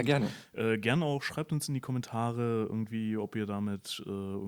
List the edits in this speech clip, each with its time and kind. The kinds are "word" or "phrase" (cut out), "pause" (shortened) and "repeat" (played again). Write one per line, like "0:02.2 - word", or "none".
none